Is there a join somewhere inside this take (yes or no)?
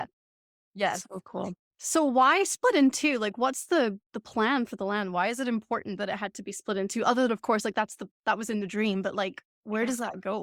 no